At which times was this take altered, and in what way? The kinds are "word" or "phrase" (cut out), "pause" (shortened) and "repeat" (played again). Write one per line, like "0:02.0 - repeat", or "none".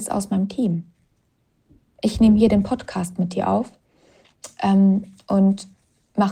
none